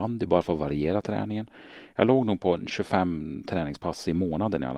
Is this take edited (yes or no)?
no